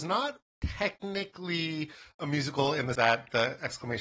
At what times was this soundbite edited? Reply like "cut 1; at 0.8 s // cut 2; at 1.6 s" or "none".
cut 1; at 2.9 s